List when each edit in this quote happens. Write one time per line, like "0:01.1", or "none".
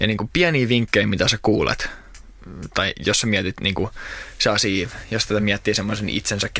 none

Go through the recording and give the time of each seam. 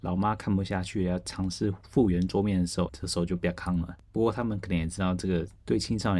0:02.9

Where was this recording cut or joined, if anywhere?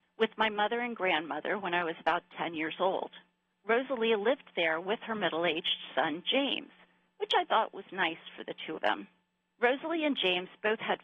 0:08.8

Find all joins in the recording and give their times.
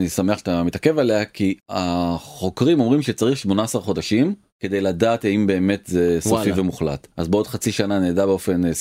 0:01.6
0:07.1

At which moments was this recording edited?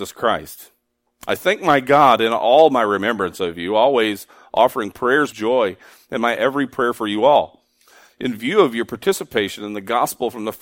0:05.3

